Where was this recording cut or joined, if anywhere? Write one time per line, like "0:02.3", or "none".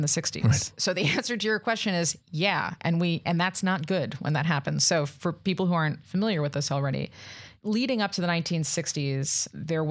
none